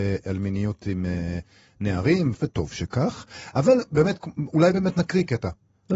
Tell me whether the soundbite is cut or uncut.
cut